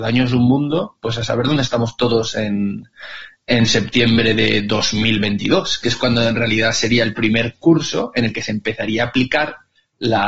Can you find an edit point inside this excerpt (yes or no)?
no